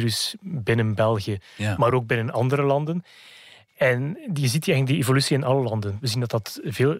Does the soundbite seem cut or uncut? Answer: uncut